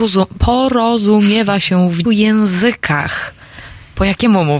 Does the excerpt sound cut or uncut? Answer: cut